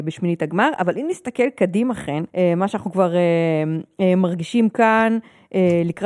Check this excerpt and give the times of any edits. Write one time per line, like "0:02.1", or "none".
0:02.3